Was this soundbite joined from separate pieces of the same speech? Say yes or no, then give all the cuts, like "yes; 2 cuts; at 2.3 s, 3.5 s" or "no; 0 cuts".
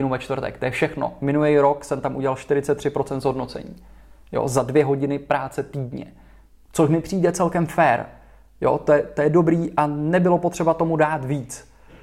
no; 0 cuts